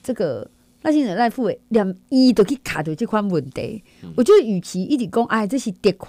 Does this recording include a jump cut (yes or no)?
no